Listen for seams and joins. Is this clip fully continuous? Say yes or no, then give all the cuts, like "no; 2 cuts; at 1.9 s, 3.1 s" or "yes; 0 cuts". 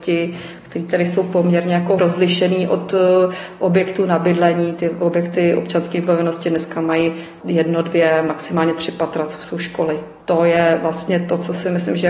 no; 2 cuts; at 2.0 s, 10.2 s